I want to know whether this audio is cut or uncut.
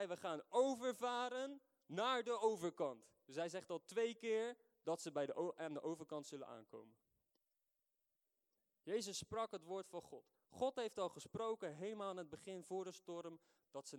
uncut